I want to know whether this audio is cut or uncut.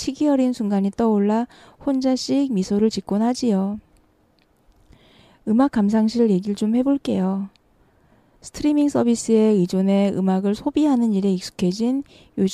uncut